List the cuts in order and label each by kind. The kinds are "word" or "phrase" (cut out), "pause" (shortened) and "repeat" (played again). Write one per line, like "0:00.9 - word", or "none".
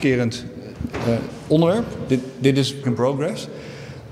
0:02.8 - word